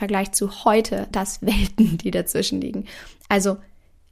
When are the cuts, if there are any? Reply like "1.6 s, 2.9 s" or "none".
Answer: 1.1 s